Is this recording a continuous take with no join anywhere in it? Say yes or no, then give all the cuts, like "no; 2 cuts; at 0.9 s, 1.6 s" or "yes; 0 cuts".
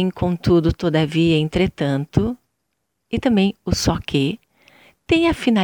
yes; 0 cuts